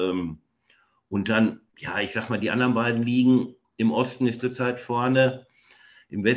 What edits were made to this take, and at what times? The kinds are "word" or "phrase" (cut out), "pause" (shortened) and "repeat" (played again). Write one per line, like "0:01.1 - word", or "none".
0:01.7 - pause
0:04.4 - phrase